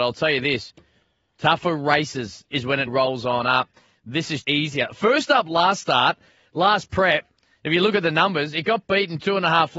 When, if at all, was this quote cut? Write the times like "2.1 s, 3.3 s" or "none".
2.9 s, 4.4 s